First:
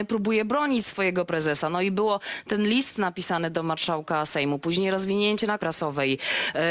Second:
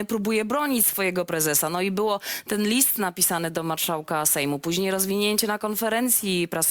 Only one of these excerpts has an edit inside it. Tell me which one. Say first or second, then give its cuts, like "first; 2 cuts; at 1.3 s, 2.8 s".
first; 1 cut; at 5.6 s